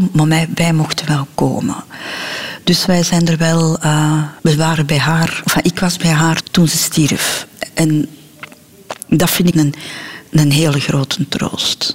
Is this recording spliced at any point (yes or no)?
yes